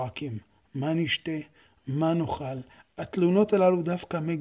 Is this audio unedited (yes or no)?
yes